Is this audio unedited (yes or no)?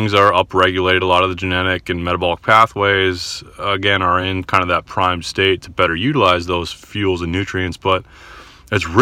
yes